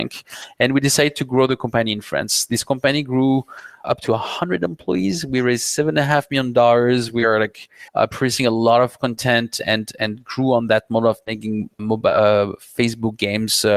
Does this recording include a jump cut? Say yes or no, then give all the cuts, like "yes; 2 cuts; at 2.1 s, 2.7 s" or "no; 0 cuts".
yes; 3 cuts; at 3.8 s, 7.9 s, 11.8 s